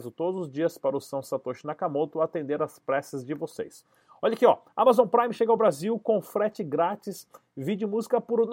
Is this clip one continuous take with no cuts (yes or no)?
yes